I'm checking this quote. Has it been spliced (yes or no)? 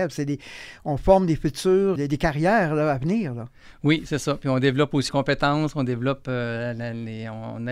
yes